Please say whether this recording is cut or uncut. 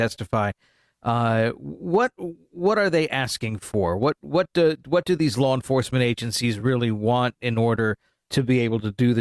uncut